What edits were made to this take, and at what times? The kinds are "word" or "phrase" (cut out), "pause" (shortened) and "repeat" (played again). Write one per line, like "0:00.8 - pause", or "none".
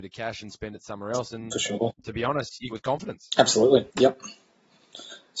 0:02.7 - phrase
0:03.9 - pause